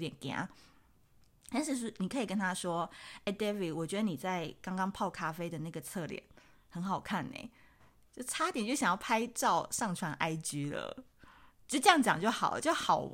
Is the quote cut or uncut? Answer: uncut